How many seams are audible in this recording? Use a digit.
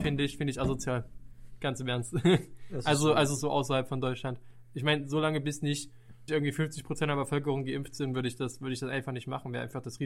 2